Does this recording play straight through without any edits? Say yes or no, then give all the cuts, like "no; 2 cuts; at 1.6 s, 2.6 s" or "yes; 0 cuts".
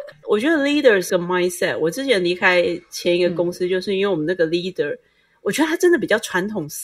no; 1 cut; at 1.1 s